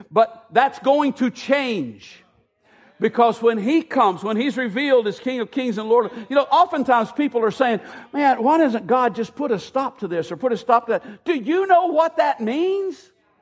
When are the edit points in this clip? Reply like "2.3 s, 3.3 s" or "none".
none